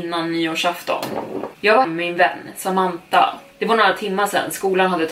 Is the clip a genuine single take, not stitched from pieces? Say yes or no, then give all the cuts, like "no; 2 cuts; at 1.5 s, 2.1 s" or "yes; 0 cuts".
no; 1 cut; at 1.8 s